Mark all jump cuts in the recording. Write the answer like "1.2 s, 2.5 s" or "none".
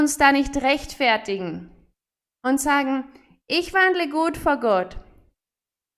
none